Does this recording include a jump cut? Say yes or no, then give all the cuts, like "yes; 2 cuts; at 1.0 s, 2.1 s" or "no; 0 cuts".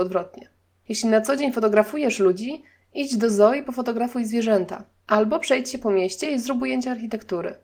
no; 0 cuts